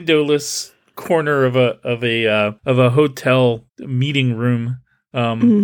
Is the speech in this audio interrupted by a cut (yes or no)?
yes